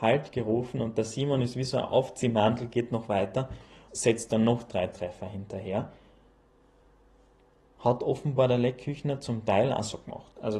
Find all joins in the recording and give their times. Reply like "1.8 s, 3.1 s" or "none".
3.9 s

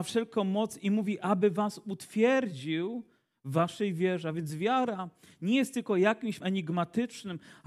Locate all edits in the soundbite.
6.4 s

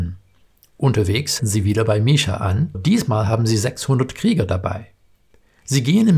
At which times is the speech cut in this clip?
1.4 s, 2.7 s

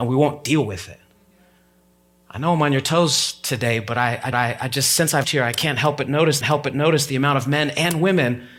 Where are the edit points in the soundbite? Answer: 4.3 s, 5.2 s, 6.4 s

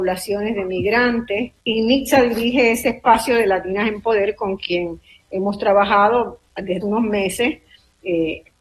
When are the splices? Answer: 1.6 s, 6.8 s

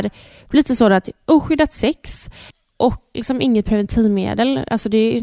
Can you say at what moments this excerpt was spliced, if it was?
3.1 s

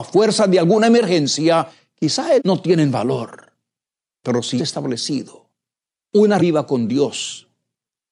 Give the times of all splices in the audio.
2.4 s, 4.6 s, 6.4 s

